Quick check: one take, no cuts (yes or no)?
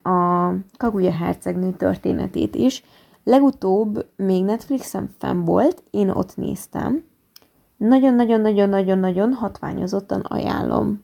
yes